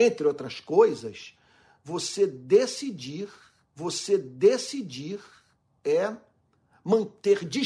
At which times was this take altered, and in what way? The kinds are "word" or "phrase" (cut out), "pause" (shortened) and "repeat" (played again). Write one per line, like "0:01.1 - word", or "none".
0:03.7 - repeat